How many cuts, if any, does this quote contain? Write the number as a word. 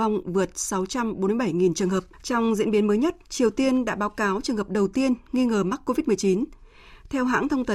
one